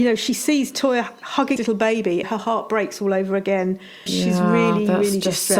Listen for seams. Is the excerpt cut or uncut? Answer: cut